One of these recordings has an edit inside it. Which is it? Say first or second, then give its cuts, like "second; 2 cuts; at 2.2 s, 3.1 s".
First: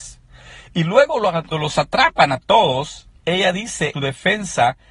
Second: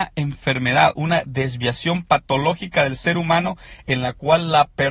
first; 3 cuts; at 1.5 s, 3.2 s, 3.9 s